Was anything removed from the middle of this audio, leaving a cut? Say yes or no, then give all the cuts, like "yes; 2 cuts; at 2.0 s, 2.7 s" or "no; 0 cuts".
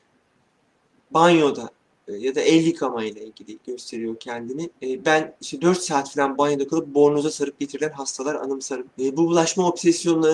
yes; 2 cuts; at 4.8 s, 8.9 s